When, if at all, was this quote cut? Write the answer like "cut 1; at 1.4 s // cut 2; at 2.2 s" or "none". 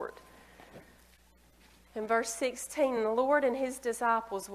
none